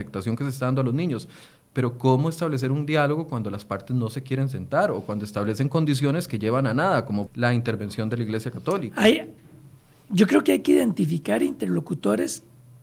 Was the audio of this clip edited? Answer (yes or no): yes